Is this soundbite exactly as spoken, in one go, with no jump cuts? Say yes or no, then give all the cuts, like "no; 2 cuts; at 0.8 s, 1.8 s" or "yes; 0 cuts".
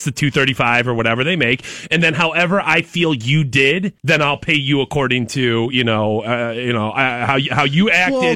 no; 1 cut; at 4.0 s